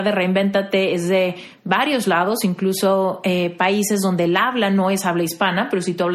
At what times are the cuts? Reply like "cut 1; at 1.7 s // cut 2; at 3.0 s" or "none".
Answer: none